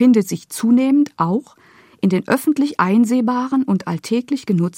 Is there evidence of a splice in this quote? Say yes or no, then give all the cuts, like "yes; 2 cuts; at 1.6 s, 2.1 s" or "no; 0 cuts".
no; 0 cuts